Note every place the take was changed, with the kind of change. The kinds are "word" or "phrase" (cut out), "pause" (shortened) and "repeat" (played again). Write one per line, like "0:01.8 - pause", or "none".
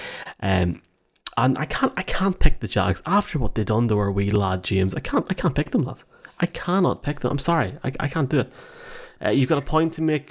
none